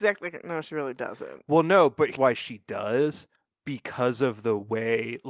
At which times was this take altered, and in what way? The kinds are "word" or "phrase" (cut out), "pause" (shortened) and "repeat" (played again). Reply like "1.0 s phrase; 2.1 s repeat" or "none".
2.2 s word